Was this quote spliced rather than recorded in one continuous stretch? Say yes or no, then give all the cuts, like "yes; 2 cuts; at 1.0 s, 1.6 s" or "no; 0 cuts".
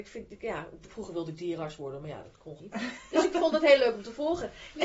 yes; 1 cut; at 2.6 s